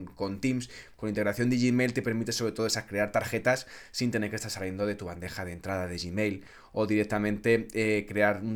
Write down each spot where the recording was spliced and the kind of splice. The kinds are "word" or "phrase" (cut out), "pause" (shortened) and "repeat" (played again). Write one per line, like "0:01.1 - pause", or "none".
none